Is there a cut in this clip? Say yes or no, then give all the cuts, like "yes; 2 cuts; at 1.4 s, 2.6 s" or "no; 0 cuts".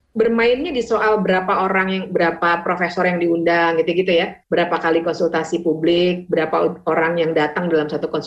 no; 0 cuts